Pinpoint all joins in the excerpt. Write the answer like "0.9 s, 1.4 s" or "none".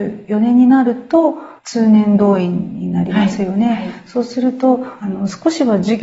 1.6 s